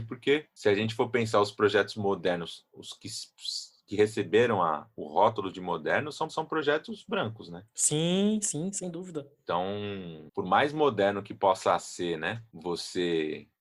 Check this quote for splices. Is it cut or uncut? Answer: cut